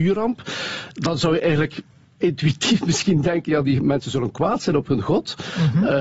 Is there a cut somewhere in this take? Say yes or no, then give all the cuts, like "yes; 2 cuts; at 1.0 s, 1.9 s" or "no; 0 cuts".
no; 0 cuts